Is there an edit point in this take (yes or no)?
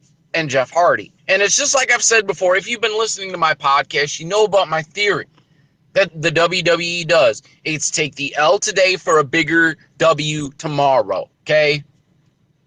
yes